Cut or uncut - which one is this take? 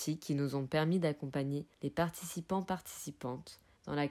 cut